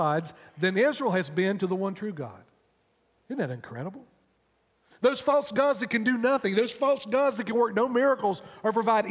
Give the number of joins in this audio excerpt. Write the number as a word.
zero